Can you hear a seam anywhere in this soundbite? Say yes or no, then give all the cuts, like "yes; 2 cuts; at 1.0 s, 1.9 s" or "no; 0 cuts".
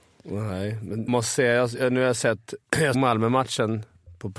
yes; 2 cuts; at 1.1 s, 2.9 s